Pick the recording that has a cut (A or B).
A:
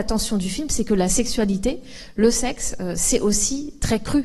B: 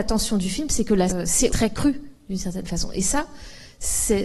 B